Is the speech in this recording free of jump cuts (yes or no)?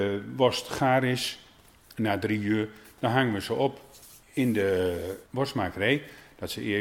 no